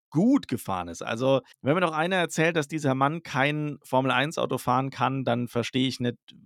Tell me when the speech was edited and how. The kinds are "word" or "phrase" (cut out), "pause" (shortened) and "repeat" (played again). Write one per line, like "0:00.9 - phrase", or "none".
0:01.5 - pause